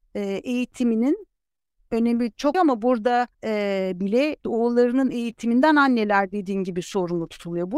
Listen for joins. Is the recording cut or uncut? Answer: cut